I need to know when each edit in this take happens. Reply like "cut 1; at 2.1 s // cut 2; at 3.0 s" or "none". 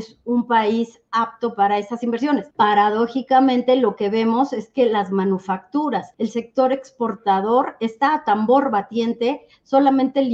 cut 1; at 2.5 s // cut 2; at 6.1 s